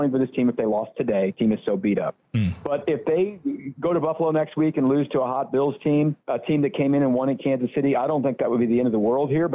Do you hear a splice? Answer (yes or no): yes